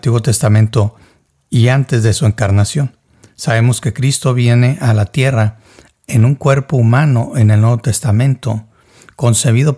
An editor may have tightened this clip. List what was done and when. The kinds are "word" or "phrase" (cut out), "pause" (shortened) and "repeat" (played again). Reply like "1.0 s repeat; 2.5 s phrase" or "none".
none